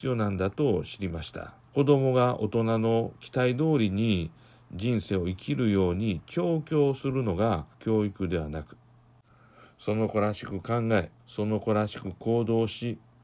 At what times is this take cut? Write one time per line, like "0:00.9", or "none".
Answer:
0:01.7
0:07.7
0:11.2